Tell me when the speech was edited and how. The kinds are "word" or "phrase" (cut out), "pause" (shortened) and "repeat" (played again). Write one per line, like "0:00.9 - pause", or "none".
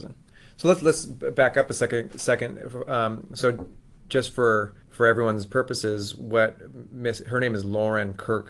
0:04.8 - pause